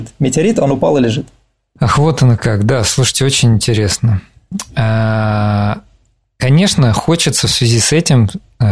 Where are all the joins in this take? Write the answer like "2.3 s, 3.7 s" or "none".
none